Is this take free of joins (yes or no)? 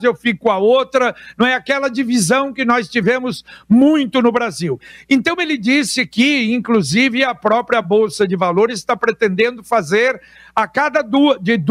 yes